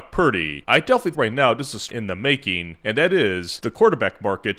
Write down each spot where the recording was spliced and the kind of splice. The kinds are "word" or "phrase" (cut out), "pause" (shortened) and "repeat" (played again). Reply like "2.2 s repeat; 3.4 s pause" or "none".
1.1 s word; 1.9 s word